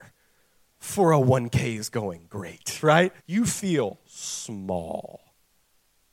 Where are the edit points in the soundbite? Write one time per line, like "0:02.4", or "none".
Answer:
0:03.2